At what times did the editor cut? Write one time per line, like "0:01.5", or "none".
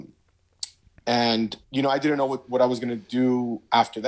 0:01.6